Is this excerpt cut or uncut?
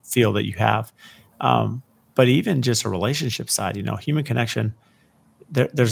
uncut